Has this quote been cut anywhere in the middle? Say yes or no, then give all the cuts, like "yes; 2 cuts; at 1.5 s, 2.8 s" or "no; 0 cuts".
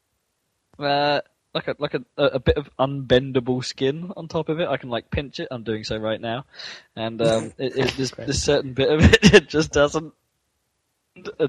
no; 0 cuts